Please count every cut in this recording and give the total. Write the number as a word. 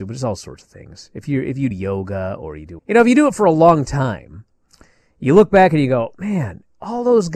two